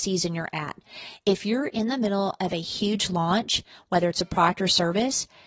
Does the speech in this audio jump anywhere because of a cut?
no; 0 cuts

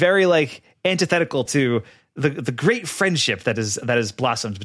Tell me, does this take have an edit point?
no; 0 cuts

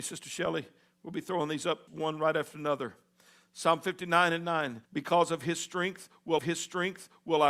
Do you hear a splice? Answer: yes; 3 cuts; at 1.9 s, 4.8 s, 6.4 s

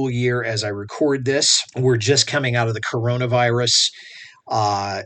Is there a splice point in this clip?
yes; 1 cut; at 1.7 s

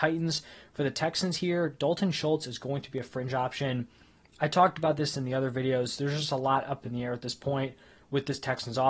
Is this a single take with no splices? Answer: yes; 0 cuts

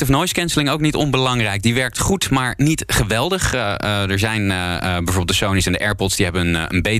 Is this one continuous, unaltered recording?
yes; 0 cuts

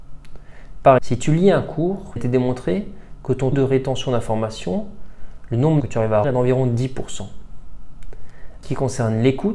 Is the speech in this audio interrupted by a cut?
yes; 6 cuts; at 1.0 s, 2.2 s, 3.5 s, 5.8 s, 6.2 s, 8.6 s

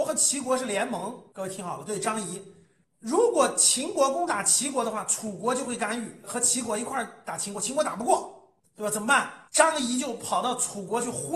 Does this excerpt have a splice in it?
yes; 2 cuts; at 8.6 s, 9.5 s

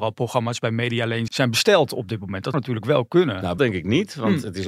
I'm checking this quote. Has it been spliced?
yes; 3 cuts; at 1.3 s, 2.5 s, 3.6 s

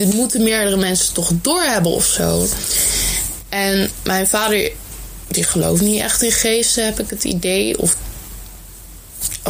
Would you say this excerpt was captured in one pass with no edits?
yes; 0 cuts

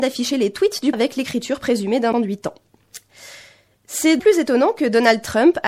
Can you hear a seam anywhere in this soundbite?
yes; 3 cuts; at 0.9 s, 2.1 s, 4.2 s

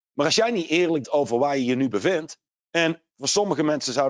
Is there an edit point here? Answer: yes; 2 cuts; at 1.0 s, 2.5 s

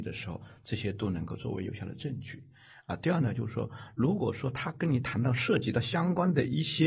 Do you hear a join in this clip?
no; 0 cuts

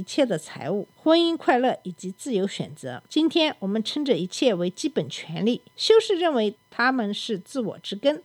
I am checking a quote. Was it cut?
yes; 3 cuts; at 0.9 s, 3.1 s, 5.7 s

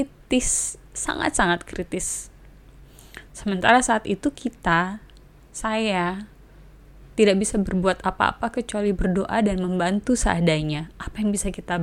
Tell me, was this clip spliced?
yes; 1 cut; at 5.2 s

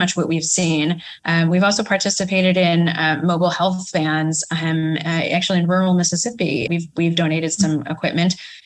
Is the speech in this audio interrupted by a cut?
yes; 1 cut; at 6.7 s

